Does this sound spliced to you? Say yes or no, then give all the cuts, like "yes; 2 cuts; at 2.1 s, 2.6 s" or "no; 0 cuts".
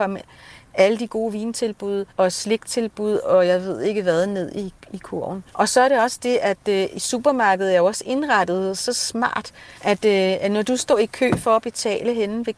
yes; 3 cuts; at 2.1 s, 5.5 s, 9.8 s